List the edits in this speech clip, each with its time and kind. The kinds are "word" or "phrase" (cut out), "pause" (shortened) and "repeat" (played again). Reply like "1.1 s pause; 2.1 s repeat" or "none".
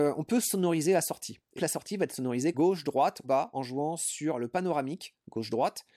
1.6 s word; 2.5 s phrase; 3.2 s word